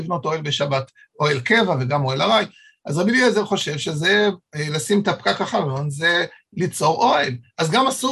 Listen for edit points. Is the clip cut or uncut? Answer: uncut